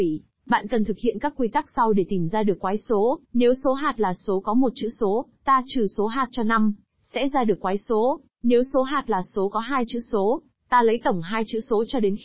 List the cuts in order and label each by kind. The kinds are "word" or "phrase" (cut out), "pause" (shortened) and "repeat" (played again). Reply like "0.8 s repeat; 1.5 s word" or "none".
3.2 s pause; 8.3 s pause